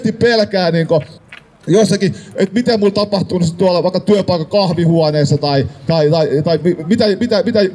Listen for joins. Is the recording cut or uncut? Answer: uncut